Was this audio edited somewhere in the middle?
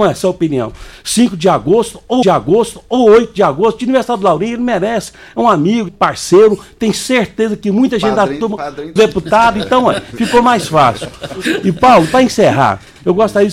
yes; 3 cuts; at 2.2 s, 5.9 s, 9.0 s

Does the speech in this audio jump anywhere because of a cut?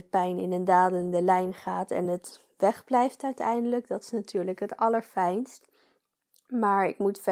no; 0 cuts

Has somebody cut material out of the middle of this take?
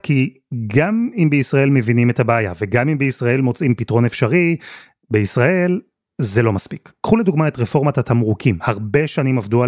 no; 0 cuts

